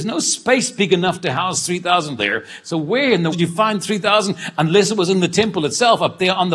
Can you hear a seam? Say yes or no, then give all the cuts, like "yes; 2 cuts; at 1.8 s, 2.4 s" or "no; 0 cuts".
yes; 2 cuts; at 2.2 s, 3.3 s